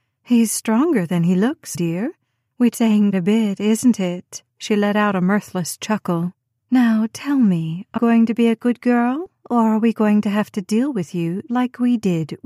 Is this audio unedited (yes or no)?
no